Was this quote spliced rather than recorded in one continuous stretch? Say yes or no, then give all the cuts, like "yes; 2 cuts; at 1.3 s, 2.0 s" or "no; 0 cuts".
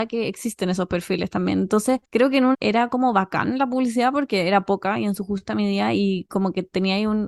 yes; 2 cuts; at 2.0 s, 2.5 s